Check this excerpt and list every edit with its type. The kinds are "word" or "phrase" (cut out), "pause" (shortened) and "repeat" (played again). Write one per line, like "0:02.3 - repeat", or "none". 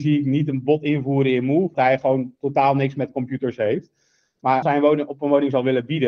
0:01.7 - word
0:04.6 - word

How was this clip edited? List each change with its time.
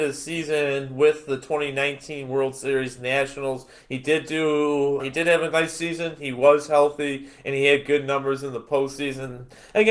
0:05.0 - word

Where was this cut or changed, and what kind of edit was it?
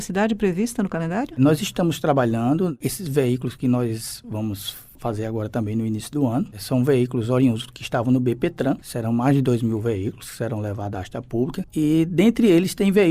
none

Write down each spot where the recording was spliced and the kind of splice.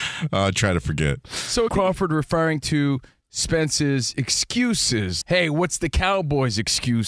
0:01.7 - word
0:05.2 - word

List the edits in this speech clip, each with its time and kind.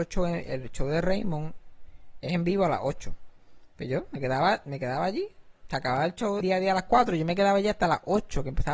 0:06.4 - word

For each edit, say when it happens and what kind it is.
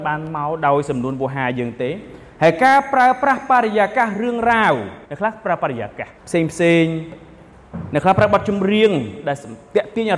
0:05.0 - pause
0:06.2 - pause

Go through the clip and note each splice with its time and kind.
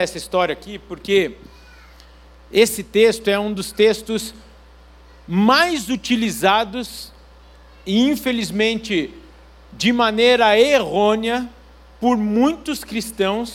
none

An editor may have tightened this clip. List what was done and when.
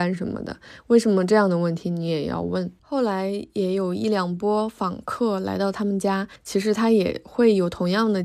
0:02.8 - pause
0:06.4 - pause

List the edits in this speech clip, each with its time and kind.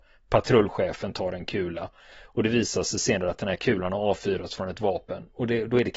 none

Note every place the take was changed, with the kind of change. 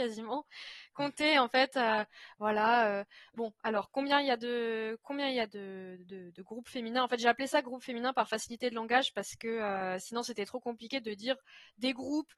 none

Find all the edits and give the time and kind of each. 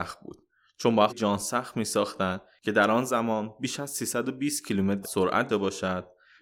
0:01.1 - word
0:05.0 - phrase
0:05.5 - word

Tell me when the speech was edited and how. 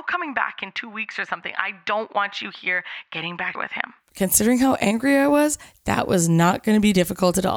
0:03.5 - word

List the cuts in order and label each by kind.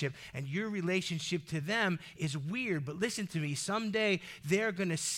none

